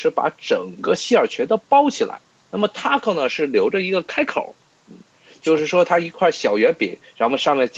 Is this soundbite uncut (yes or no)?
yes